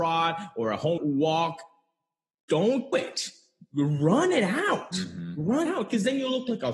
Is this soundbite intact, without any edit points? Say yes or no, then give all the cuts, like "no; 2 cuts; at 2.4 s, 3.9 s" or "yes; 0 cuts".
no; 3 cuts; at 1.0 s, 2.9 s, 5.7 s